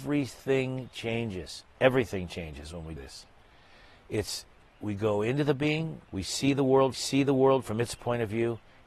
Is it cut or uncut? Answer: cut